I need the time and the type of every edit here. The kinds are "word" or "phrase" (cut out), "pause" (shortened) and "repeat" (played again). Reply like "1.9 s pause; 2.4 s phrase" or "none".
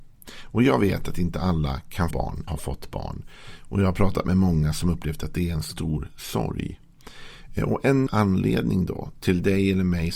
2.1 s word; 2.5 s word; 8.1 s word